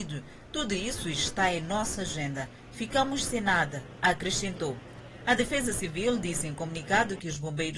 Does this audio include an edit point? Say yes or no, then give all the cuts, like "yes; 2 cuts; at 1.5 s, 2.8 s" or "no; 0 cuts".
no; 0 cuts